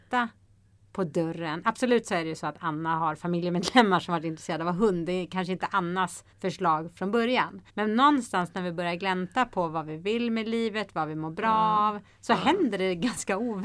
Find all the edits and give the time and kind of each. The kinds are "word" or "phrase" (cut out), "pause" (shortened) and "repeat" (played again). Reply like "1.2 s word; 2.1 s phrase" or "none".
6.3 s pause; 7.7 s pause